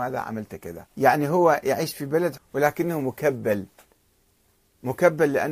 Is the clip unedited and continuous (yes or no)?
no